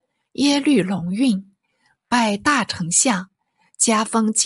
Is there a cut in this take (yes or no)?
no